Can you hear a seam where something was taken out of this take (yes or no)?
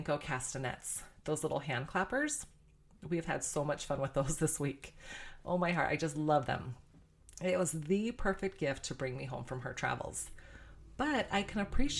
no